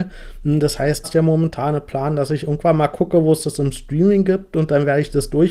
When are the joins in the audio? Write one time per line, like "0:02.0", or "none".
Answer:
0:01.0